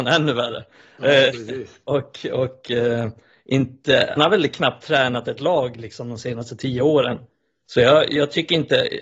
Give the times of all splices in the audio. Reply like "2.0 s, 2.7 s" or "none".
4.2 s